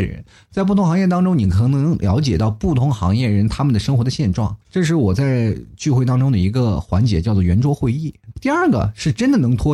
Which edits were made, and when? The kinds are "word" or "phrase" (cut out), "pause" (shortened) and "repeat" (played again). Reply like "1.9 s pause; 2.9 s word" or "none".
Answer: 4.6 s pause